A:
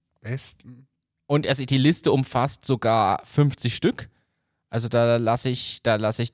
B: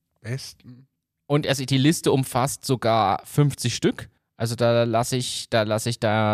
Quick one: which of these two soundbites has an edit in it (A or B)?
B